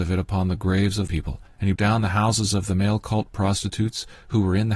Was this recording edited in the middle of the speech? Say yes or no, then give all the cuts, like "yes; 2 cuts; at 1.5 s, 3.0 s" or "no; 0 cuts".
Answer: yes; 2 cuts; at 1.1 s, 1.8 s